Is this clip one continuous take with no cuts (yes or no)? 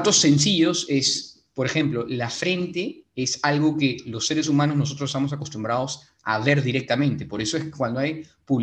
yes